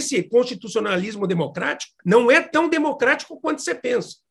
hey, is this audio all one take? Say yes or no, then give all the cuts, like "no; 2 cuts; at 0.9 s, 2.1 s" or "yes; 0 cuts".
no; 1 cut; at 2.0 s